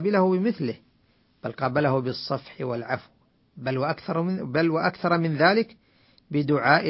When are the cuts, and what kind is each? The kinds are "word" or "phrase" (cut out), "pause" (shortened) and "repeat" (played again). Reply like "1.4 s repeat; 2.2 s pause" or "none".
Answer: none